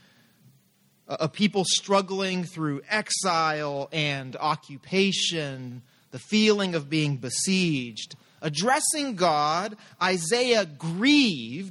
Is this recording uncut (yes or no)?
yes